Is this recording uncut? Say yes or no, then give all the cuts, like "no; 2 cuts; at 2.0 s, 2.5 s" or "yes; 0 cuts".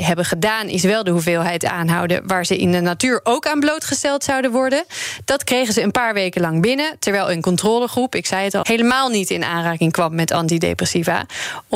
no; 1 cut; at 8.6 s